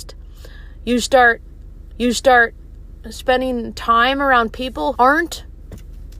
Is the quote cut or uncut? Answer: cut